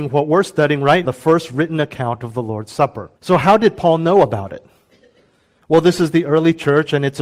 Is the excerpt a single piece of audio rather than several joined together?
no; 2 cuts; at 1.0 s, 3.2 s

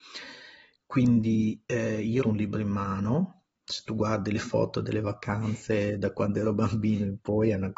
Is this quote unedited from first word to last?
no; 2 cuts; at 1.6 s, 2.2 s

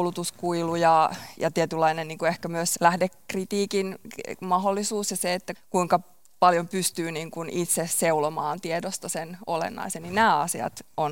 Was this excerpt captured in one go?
no; 3 cuts; at 1.4 s, 2.8 s, 5.5 s

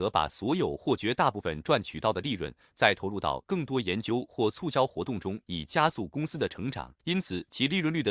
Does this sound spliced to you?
yes; 1 cut; at 7.0 s

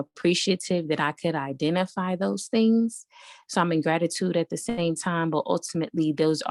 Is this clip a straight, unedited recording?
yes; 0 cuts

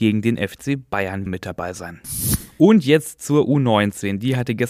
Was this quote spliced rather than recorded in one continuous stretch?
yes; 1 cut; at 1.3 s

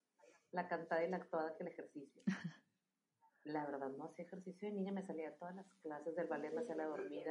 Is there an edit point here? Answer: no; 0 cuts

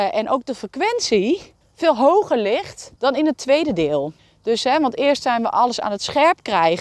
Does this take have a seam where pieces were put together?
yes; 3 cuts; at 1.6 s, 3.0 s, 4.2 s

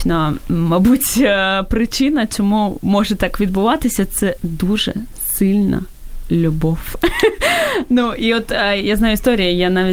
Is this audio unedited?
yes; 0 cuts

